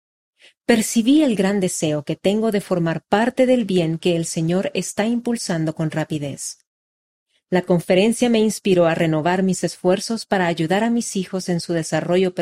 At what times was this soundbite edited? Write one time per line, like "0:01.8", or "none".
none